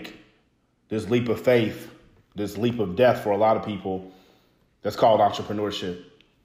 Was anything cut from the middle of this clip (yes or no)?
no